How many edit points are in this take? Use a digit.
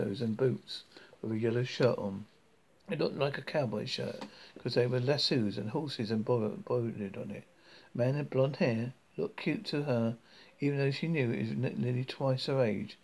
0